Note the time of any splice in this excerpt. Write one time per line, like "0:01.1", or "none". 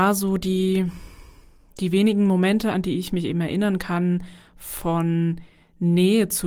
none